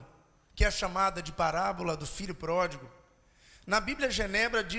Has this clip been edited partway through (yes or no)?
no